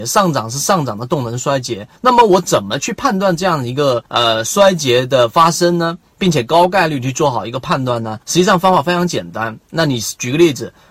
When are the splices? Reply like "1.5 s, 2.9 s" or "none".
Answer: 2.0 s, 4.1 s, 8.2 s